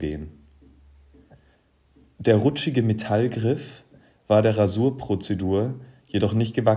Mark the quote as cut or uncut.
uncut